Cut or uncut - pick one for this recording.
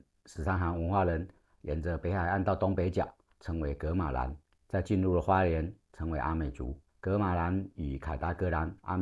cut